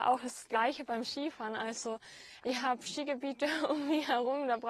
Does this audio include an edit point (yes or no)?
no